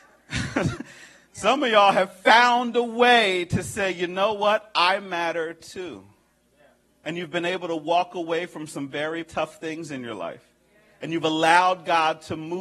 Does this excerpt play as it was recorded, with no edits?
no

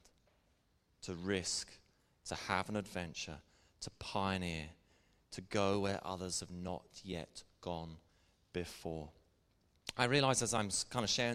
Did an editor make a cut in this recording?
no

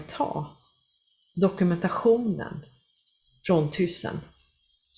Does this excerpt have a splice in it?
no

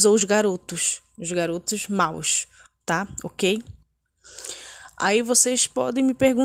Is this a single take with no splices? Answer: yes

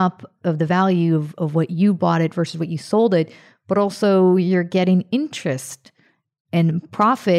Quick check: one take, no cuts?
yes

